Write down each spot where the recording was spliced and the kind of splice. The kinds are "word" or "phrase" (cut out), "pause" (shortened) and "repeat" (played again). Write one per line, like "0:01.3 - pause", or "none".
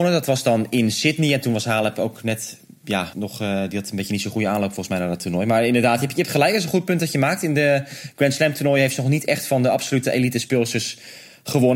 0:03.1 - word